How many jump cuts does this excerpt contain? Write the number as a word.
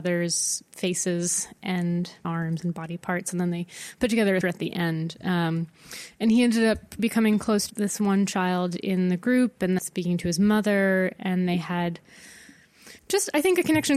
six